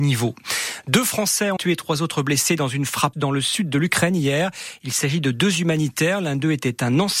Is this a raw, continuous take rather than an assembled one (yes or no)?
no